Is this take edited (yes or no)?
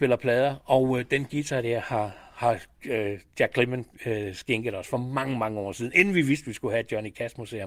no